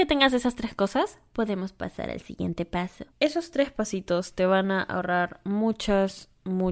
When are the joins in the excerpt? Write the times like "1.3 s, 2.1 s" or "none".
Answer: 3.1 s